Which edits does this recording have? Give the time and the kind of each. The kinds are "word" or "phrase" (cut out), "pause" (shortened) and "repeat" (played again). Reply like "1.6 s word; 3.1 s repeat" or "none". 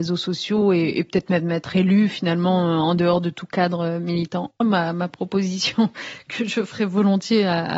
4.6 s pause